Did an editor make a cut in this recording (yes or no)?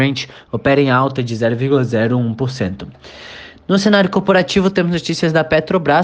no